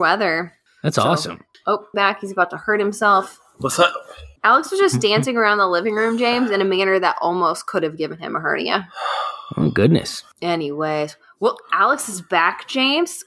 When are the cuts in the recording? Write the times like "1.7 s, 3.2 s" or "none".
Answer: 1.9 s, 4.4 s